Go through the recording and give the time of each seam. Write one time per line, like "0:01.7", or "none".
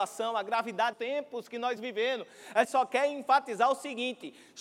0:00.9
0:01.8
0:02.6